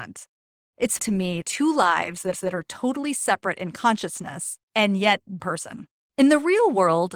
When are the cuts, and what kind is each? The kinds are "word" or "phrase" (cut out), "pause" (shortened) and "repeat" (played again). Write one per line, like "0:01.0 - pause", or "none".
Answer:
0:01.0 - word
0:01.4 - phrase
0:02.3 - repeat
0:04.6 - pause
0:05.4 - phrase
0:06.0 - pause